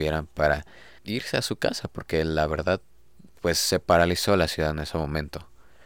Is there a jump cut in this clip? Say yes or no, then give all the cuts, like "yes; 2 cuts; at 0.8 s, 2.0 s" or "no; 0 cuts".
yes; 2 cuts; at 1.0 s, 3.4 s